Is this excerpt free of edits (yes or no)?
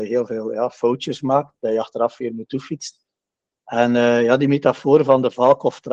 yes